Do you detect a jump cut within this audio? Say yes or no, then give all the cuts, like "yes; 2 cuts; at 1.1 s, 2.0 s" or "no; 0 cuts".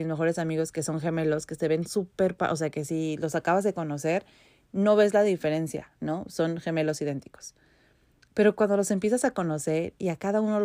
no; 0 cuts